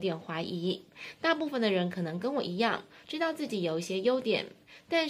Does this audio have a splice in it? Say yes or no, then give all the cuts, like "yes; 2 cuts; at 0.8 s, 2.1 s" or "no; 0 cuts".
no; 0 cuts